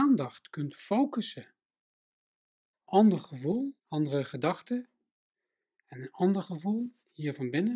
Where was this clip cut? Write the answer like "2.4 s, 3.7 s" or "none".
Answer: 2.9 s, 3.8 s

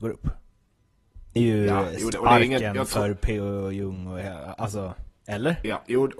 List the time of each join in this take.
1.4 s, 2.1 s, 5.2 s

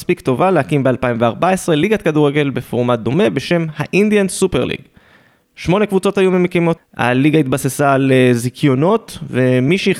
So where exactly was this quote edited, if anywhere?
6.8 s

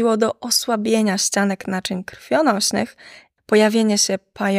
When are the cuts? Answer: 3.4 s

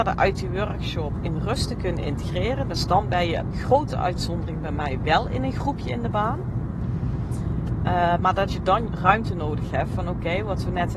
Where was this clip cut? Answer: 3.5 s, 8.5 s, 8.9 s

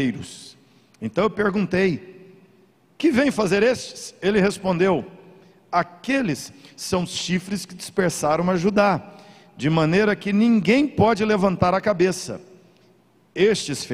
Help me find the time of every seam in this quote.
none

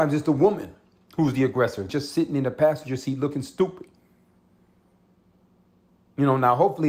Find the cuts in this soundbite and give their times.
1.9 s

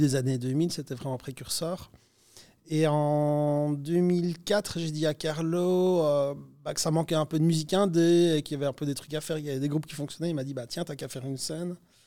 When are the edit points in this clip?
none

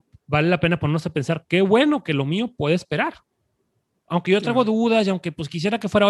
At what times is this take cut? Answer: none

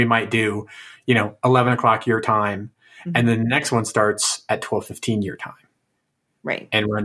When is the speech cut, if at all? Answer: none

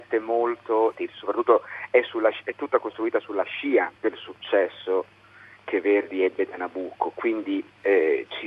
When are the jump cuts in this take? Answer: 1.0 s, 4.0 s

